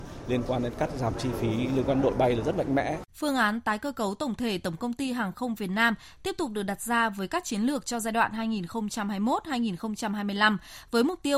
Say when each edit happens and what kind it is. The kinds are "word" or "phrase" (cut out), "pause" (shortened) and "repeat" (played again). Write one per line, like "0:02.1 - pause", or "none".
0:03.1 - pause